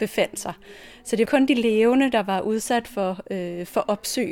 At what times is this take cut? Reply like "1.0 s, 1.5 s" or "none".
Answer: 1.3 s